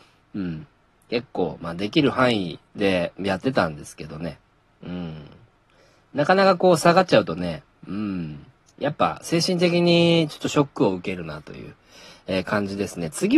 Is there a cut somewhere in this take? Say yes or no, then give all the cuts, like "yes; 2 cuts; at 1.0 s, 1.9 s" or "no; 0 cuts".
yes; 1 cut; at 2.7 s